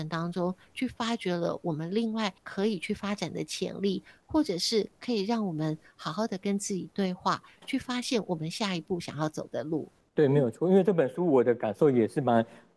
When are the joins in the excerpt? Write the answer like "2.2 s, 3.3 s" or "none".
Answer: none